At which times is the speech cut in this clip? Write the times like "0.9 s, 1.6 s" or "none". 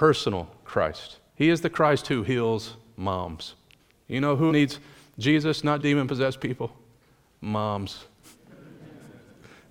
1.3 s, 3.8 s, 4.5 s, 5.8 s

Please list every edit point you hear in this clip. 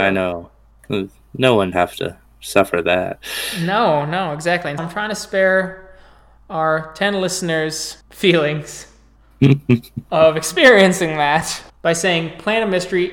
1.7 s, 4.8 s, 8.0 s, 11.7 s

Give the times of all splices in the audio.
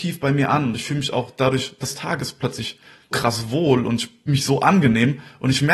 1.8 s, 3.1 s, 4.3 s

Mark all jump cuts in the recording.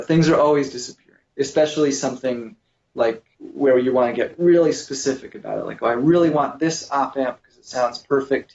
1.3 s, 3.3 s

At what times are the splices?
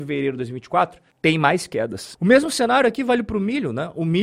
1.1 s

